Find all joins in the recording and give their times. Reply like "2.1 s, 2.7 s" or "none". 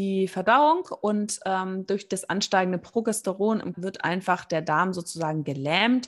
3.7 s